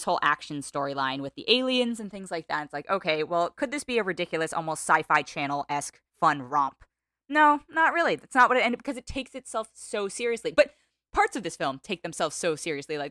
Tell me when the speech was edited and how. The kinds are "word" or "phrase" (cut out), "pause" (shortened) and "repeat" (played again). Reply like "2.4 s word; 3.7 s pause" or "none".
6.1 s pause